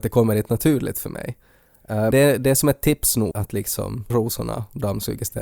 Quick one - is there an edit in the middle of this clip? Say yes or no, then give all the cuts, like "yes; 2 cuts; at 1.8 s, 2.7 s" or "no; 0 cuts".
yes; 3 cuts; at 2.1 s, 3.3 s, 4.1 s